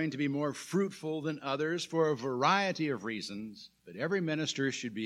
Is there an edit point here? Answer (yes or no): yes